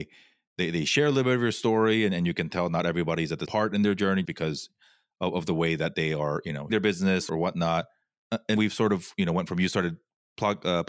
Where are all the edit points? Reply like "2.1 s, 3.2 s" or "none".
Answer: 3.5 s, 4.2 s, 6.7 s, 7.3 s, 8.6 s